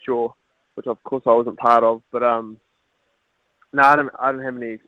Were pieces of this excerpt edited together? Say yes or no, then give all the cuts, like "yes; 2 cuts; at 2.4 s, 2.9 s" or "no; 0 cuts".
no; 0 cuts